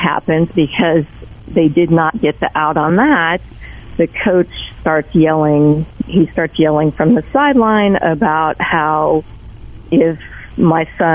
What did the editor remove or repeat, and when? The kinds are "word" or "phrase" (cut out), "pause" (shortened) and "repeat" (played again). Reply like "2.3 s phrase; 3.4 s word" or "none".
none